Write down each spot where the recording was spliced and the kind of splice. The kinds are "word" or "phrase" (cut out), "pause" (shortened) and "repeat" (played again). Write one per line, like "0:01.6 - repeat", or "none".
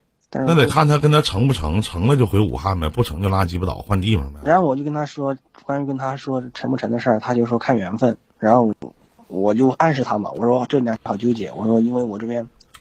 0:09.1 - pause

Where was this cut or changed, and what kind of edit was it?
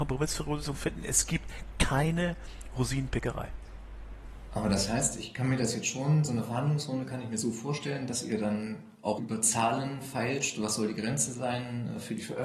0:09.2 - word

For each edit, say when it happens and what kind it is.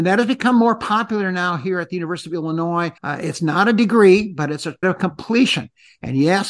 0:03.0 - pause
0:04.8 - word

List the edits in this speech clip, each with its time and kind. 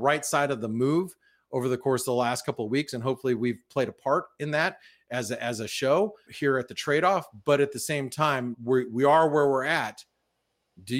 0:06.3 - word
0:08.5 - word

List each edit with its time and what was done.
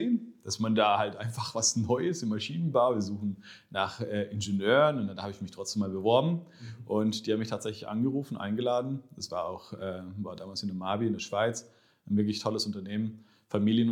none

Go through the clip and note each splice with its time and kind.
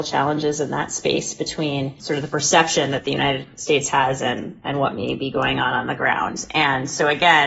none

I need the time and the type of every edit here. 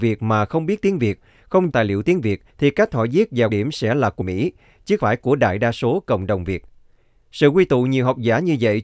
0:01.7 - word
0:02.5 - pause
0:03.5 - word
0:04.2 - word
0:05.0 - word

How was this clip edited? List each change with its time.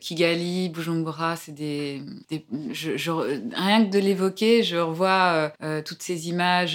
0:02.2 - pause
0:05.5 - pause

